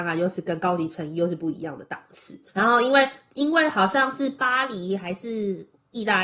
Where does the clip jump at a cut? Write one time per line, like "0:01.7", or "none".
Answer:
0:02.5